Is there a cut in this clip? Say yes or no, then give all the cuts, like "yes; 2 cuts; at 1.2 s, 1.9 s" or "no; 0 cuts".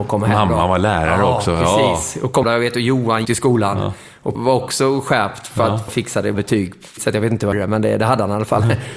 yes; 7 cuts; at 2.4 s, 3.3 s, 4.4 s, 5.9 s, 6.3 s, 7.0 s, 7.5 s